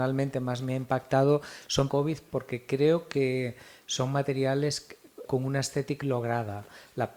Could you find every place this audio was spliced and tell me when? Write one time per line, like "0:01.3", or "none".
0:01.9
0:05.2
0:06.0